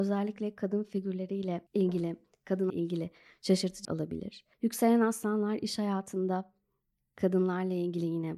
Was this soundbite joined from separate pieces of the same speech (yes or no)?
yes